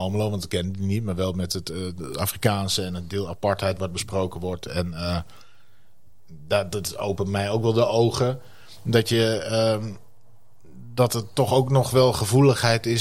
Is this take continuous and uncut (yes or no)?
yes